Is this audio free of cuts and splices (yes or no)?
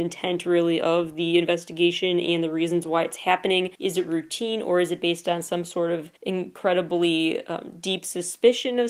no